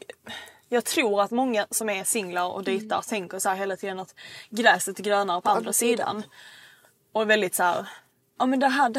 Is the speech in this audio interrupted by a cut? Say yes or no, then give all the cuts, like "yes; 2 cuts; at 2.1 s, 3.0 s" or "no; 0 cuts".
no; 0 cuts